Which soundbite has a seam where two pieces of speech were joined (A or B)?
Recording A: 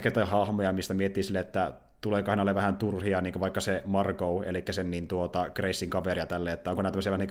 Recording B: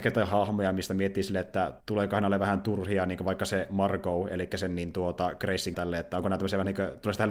B